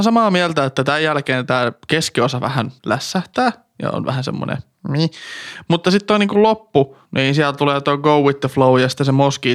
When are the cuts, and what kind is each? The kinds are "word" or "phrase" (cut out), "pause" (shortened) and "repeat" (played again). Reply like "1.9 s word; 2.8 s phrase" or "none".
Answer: 2.8 s pause; 7.0 s pause